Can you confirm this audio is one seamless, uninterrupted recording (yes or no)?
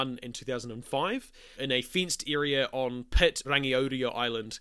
no